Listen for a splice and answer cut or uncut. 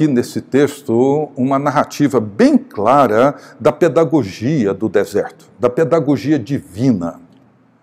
uncut